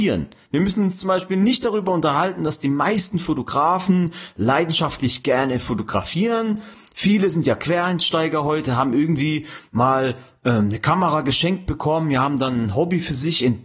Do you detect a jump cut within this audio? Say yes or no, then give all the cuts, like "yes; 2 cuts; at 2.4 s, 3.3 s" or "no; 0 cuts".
no; 0 cuts